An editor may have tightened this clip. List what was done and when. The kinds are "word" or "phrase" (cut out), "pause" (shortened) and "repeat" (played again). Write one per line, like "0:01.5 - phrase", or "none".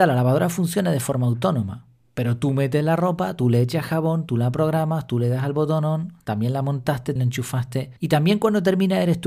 0:07.2 - word
0:08.0 - pause